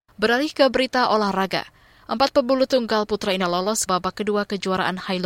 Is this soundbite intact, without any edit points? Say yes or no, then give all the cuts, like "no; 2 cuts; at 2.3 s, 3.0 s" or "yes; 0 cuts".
no; 3 cuts; at 2.7 s, 3.4 s, 3.9 s